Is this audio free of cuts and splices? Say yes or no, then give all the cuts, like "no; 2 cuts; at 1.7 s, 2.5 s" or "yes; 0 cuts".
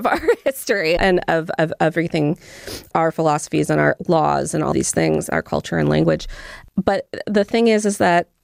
no; 2 cuts; at 1.0 s, 4.7 s